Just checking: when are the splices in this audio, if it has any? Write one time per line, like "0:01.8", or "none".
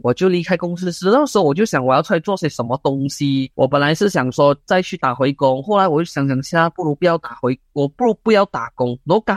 0:03.5